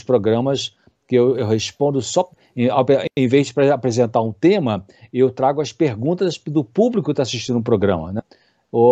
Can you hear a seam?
no; 0 cuts

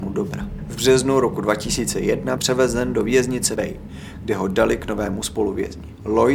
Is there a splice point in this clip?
yes; 2 cuts; at 2.4 s, 3.6 s

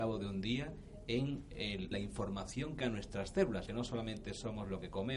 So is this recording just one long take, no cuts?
no; 3 cuts; at 1.9 s, 2.8 s, 3.7 s

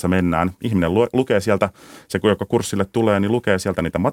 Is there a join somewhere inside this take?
no; 0 cuts

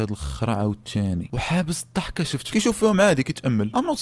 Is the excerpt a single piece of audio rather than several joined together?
no; 1 cut; at 2.5 s

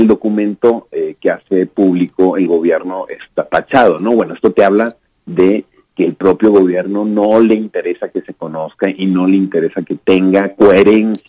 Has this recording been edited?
no; 0 cuts

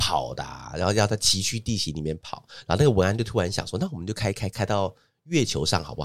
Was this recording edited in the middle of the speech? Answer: no; 0 cuts

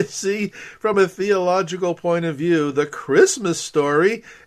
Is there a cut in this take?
no; 0 cuts

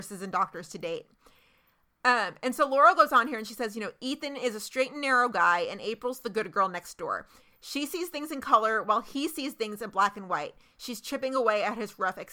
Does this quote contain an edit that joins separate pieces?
no; 0 cuts

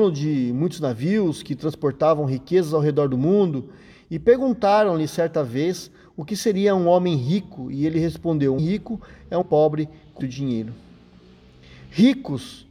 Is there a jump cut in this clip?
yes; 3 cuts; at 8.6 s, 9.4 s, 10.2 s

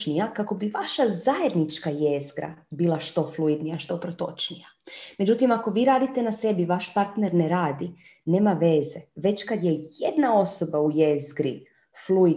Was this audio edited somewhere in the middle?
no; 0 cuts

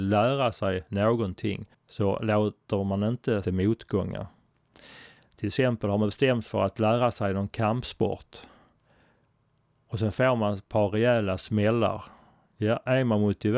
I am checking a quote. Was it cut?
yes; 3 cuts; at 1.7 s, 3.4 s, 6.5 s

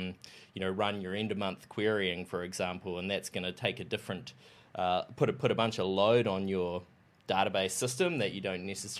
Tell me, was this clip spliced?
no; 0 cuts

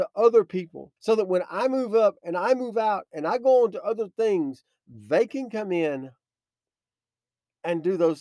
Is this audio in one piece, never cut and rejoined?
no; 1 cut; at 1.0 s

